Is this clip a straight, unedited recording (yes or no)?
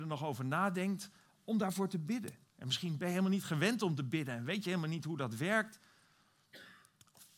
yes